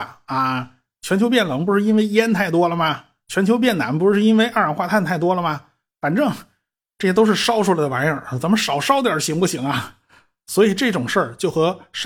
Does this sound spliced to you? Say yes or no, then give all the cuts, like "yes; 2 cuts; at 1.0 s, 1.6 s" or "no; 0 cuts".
no; 0 cuts